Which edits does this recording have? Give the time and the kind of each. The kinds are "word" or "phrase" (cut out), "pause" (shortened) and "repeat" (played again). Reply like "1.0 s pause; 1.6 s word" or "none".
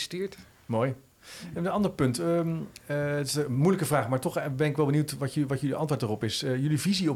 none